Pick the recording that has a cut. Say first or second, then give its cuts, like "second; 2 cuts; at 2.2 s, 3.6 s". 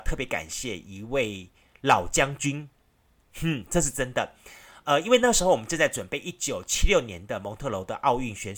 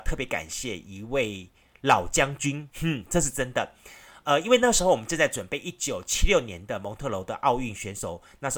second; 1 cut; at 2.7 s